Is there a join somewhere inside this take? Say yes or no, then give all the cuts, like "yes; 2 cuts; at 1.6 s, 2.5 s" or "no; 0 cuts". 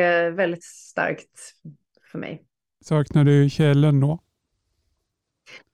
no; 0 cuts